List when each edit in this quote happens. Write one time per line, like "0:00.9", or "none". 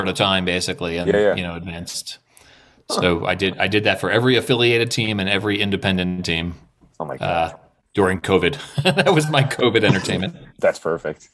0:01.0